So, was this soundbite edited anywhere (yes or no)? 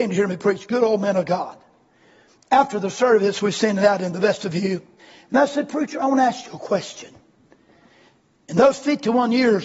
yes